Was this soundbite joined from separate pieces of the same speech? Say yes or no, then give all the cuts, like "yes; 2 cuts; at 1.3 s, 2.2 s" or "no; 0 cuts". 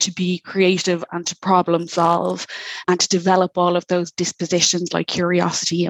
yes; 1 cut; at 2.8 s